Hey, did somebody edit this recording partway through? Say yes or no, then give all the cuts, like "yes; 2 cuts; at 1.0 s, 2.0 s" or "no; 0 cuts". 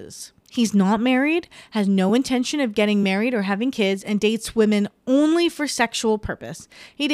no; 0 cuts